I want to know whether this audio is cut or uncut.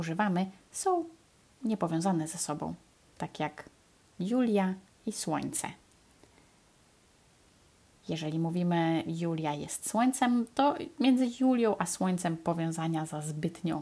uncut